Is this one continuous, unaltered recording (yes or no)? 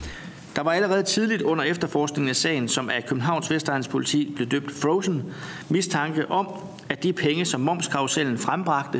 yes